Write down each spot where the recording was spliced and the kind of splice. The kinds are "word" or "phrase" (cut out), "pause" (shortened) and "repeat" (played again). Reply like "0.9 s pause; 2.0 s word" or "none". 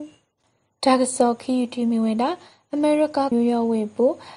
3.3 s word

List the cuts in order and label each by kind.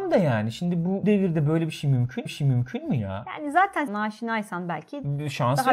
1.0 s word; 2.3 s repeat; 3.9 s word

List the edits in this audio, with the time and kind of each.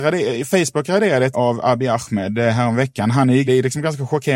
1.3 s word; 3.5 s phrase

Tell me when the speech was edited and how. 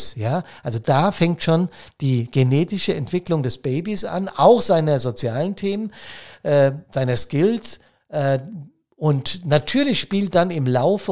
none

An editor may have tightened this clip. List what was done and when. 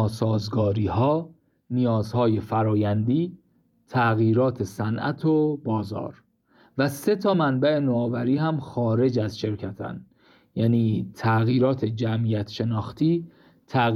none

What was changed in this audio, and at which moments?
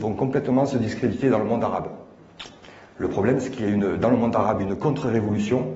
none

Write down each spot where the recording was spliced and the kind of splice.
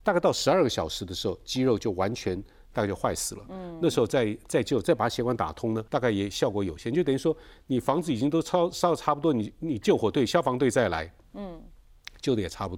5.9 s pause

